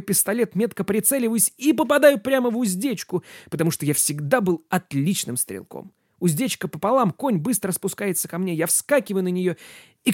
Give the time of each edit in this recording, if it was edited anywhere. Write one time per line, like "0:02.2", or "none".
none